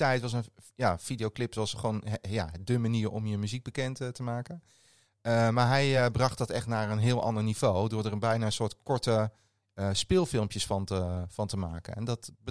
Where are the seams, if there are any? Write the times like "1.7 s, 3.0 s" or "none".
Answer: none